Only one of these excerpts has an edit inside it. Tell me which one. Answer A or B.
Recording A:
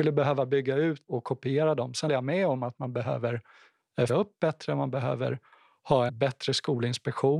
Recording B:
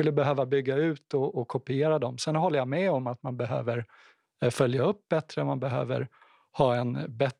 A